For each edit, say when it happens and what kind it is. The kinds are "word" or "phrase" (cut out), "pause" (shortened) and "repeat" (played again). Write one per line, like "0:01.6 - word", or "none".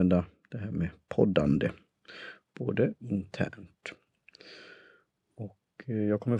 0:03.0 - phrase